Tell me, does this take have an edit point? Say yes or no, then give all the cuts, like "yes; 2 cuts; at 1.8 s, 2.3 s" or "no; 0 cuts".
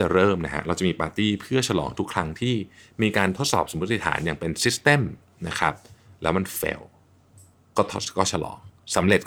no; 0 cuts